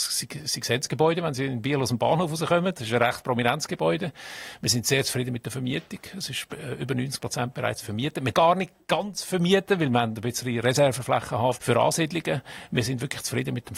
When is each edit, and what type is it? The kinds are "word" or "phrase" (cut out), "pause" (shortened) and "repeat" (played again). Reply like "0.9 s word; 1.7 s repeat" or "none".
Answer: 8.3 s word; 11.6 s word